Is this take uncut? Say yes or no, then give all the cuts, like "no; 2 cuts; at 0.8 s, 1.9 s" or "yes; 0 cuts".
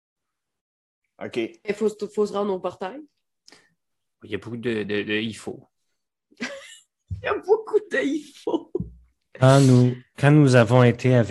yes; 0 cuts